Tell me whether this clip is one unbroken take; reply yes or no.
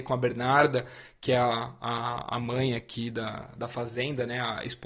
yes